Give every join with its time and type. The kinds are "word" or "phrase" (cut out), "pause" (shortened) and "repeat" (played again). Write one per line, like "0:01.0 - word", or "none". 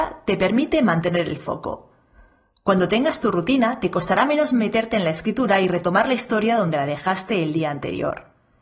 none